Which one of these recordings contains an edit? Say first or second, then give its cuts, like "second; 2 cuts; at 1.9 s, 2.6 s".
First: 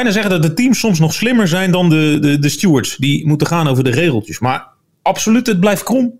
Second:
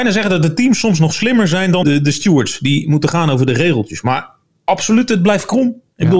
second; 1 cut; at 1.8 s